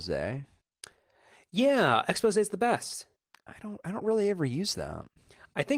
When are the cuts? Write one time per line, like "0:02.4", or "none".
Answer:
none

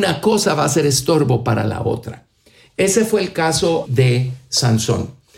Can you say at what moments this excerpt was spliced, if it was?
0:03.9

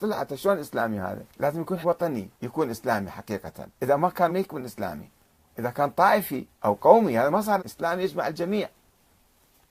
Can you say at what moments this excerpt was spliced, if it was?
0:01.3
0:01.8
0:02.3
0:03.7
0:04.3
0:05.3
0:06.5
0:07.6

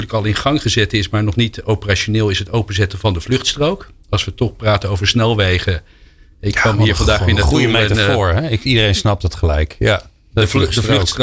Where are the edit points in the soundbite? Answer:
none

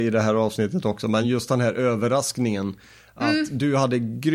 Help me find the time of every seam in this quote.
none

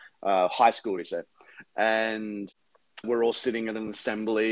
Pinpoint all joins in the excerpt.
0:01.0
0:03.0

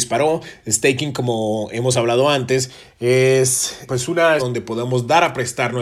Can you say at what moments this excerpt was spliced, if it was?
0:03.9
0:04.4

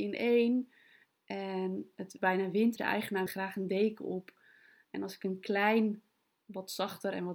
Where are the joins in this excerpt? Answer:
0:02.2
0:02.8
0:03.3

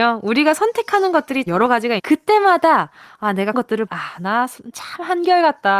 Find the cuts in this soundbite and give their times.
0:01.5
0:02.0
0:03.5
0:03.9
0:04.7

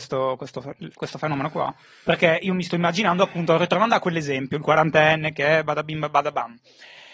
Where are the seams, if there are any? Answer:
none

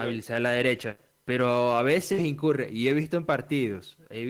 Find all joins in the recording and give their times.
none

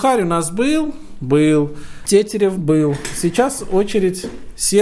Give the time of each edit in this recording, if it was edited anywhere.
0:02.5

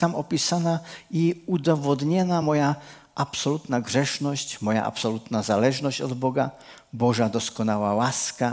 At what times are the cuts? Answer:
none

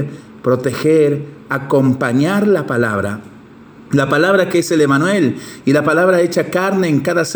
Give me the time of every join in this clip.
none

